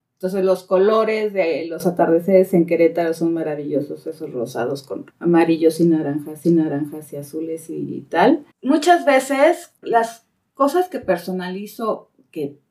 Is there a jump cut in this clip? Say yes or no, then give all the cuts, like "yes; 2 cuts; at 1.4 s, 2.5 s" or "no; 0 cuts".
yes; 4 cuts; at 5.1 s, 6.4 s, 8.5 s, 9.8 s